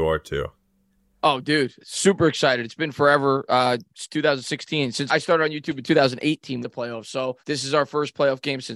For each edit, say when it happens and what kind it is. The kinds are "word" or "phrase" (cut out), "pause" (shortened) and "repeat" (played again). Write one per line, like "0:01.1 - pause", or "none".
0:01.8 - word
0:05.1 - word
0:06.6 - phrase
0:07.4 - pause